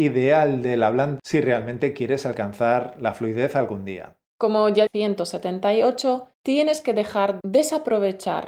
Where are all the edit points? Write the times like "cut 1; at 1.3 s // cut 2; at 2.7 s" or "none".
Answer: cut 1; at 1.2 s // cut 2; at 4.3 s // cut 3; at 4.9 s // cut 4; at 6.3 s // cut 5; at 7.4 s